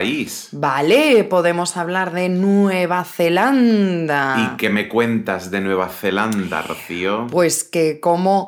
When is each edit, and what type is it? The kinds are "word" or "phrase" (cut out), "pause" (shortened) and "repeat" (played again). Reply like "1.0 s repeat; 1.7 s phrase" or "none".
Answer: none